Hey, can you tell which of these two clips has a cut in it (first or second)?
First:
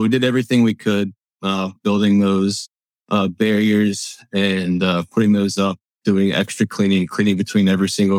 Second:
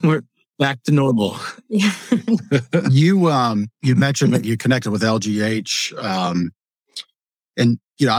first